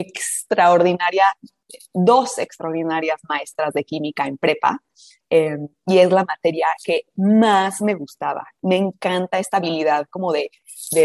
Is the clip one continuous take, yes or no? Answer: yes